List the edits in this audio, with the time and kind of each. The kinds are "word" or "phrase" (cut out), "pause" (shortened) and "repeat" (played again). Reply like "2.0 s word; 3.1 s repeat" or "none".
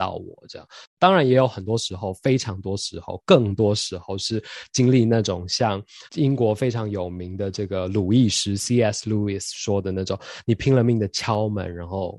6.1 s pause